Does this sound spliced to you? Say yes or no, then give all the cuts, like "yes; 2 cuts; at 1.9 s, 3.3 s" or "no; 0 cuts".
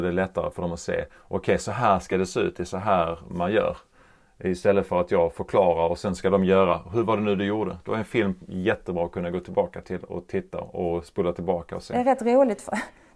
no; 0 cuts